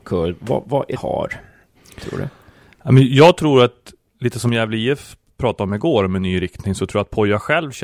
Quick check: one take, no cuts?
no; 1 cut; at 1.0 s

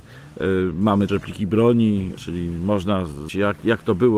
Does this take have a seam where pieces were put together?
yes; 3 cuts; at 1.1 s, 2.2 s, 3.3 s

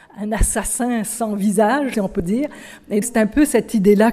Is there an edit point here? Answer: yes; 2 cuts; at 1.9 s, 3.0 s

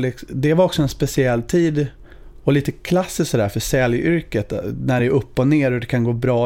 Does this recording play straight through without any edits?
yes; 0 cuts

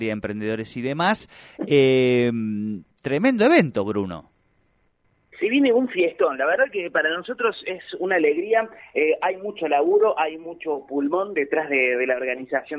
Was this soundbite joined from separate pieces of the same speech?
no; 0 cuts

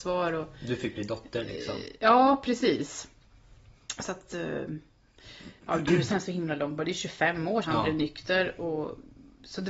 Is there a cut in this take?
yes; 3 cuts; at 5.6 s, 6.1 s, 7.6 s

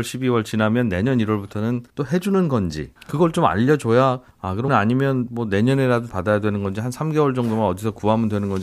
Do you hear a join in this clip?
yes; 5 cuts; at 1.9 s, 3.0 s, 4.3 s, 4.7 s, 6.1 s

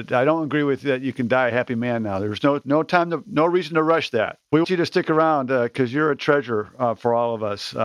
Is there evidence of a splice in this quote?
yes; 1 cut; at 4.6 s

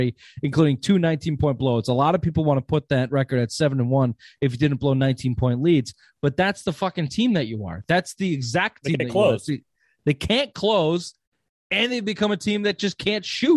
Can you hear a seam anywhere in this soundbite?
no; 0 cuts

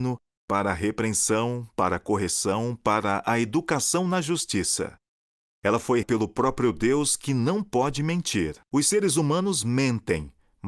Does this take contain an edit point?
yes; 2 cuts; at 6.0 s, 8.6 s

